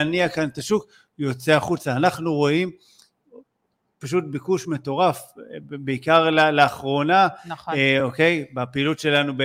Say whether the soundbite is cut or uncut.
uncut